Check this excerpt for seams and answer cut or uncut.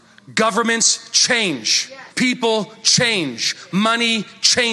cut